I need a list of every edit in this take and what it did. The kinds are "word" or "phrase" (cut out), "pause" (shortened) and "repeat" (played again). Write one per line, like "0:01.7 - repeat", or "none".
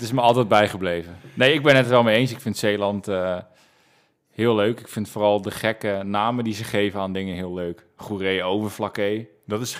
none